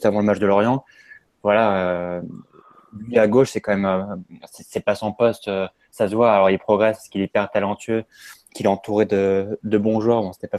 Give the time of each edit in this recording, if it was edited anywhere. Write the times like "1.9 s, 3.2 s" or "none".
8.5 s